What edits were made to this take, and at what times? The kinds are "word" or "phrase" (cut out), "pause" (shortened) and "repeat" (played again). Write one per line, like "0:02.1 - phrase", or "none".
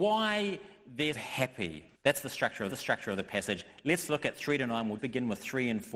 0:01.1 - word
0:01.9 - pause
0:02.7 - repeat
0:05.0 - word